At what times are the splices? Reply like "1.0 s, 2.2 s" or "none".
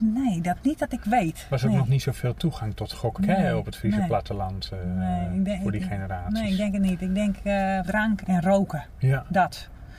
3.2 s, 7.8 s, 8.2 s